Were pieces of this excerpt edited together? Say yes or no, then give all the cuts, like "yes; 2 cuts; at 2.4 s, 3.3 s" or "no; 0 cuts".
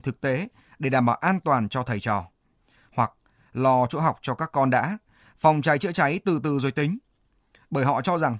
no; 0 cuts